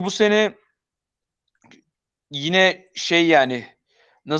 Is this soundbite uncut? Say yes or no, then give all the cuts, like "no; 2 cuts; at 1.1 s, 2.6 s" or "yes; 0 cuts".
yes; 0 cuts